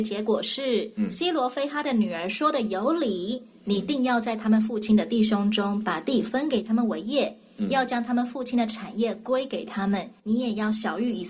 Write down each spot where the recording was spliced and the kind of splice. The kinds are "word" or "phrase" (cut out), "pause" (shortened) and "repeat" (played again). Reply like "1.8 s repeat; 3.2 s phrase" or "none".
10.2 s pause